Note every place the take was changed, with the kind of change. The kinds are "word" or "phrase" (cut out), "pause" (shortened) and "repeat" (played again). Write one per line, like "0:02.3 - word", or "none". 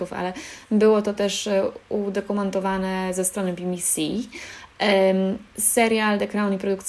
none

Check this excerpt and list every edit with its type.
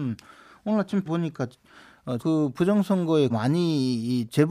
0:01.0 - word
0:02.2 - word
0:03.3 - word

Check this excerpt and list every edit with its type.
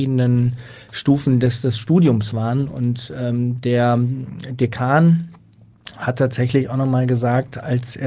none

